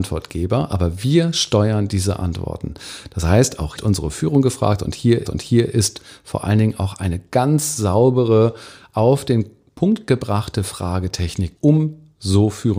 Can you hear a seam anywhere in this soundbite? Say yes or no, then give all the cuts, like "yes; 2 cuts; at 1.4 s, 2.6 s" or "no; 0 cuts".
yes; 3 cuts; at 3.8 s, 5.2 s, 11.6 s